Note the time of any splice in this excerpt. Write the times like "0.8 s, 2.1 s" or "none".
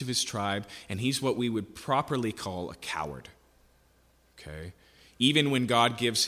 none